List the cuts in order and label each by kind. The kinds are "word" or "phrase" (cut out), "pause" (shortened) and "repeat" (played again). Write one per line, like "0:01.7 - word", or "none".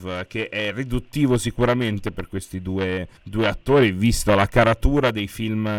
0:03.2 - pause